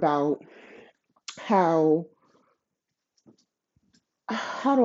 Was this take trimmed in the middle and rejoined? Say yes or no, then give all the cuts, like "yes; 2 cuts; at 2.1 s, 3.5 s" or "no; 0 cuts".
no; 0 cuts